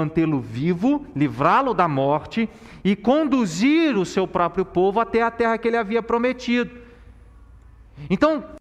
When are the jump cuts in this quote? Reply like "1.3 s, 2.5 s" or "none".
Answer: none